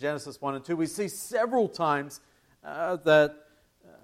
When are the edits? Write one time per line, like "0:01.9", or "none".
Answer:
none

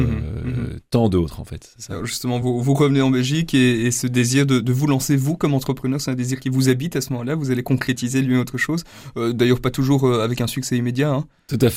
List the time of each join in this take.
none

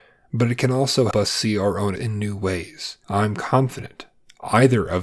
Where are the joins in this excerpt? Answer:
0:01.1
0:02.0

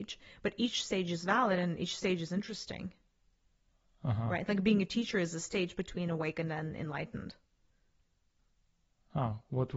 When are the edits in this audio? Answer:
none

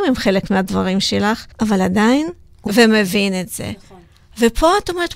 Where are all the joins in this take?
0:01.5
0:02.7

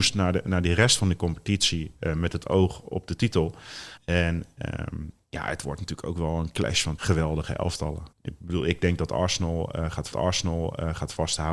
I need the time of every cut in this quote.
0:04.0
0:07.0
0:08.1
0:10.1

